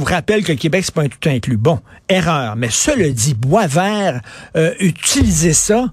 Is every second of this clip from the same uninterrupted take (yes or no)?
yes